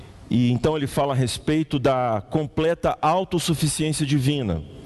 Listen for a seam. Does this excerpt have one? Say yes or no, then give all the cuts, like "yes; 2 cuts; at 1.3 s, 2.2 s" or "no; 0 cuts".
no; 0 cuts